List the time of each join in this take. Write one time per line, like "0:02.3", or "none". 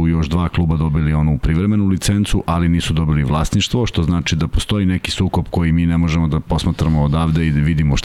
none